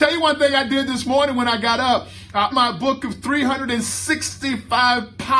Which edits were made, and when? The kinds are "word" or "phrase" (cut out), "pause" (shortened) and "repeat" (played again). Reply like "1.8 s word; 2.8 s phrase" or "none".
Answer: 2.5 s word